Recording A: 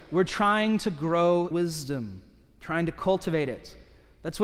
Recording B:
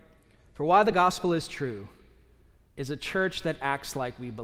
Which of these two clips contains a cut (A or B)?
A